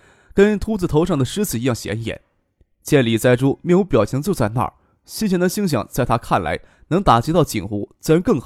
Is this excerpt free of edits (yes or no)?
yes